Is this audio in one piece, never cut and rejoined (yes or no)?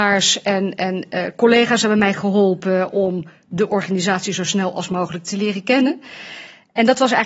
yes